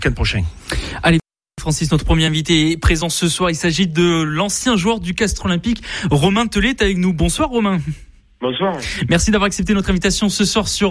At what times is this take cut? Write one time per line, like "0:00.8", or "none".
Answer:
none